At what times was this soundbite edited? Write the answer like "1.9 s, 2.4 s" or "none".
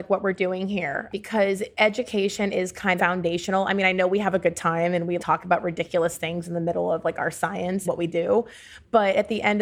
3.0 s, 5.2 s, 7.8 s